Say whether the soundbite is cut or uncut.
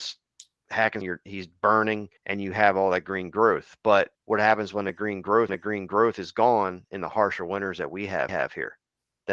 cut